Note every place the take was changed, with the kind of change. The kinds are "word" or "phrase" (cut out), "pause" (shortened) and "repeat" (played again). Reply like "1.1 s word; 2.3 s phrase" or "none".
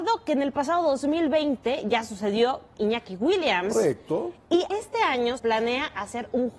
2.8 s word; 4.7 s word; 5.4 s word